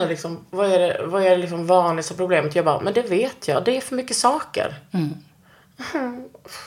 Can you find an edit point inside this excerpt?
no; 0 cuts

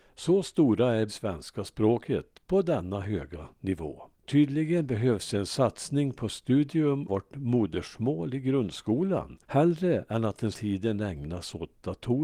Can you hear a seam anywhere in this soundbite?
yes; 5 cuts; at 1.1 s, 4.1 s, 7.1 s, 9.4 s, 10.5 s

